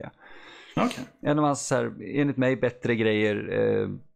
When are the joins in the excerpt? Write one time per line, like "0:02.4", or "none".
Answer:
none